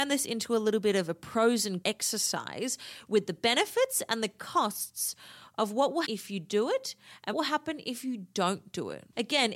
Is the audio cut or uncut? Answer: cut